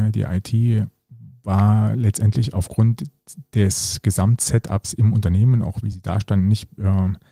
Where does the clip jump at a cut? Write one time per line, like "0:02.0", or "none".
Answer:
none